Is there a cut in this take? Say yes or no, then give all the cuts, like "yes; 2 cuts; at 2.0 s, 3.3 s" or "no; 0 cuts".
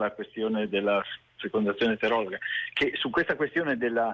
no; 0 cuts